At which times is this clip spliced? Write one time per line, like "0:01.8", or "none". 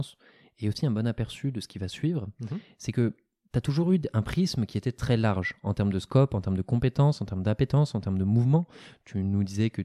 none